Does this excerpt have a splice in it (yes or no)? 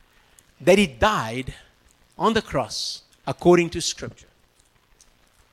yes